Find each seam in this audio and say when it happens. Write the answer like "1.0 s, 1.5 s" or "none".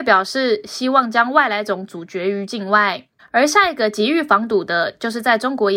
3.2 s